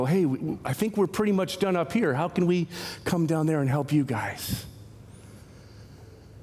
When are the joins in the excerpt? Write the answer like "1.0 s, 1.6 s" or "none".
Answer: none